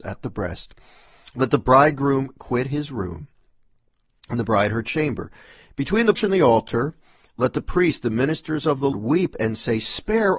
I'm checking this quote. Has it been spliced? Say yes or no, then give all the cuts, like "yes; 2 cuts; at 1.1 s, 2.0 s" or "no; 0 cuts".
yes; 2 cuts; at 6.2 s, 8.9 s